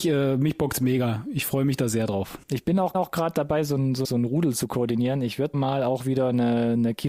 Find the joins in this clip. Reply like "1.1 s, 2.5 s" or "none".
2.4 s, 2.9 s, 4.0 s, 5.5 s